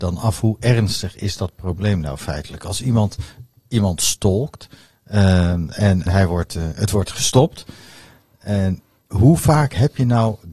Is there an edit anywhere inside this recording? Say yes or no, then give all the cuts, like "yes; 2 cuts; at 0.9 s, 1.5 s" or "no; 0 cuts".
yes; 1 cut; at 6.1 s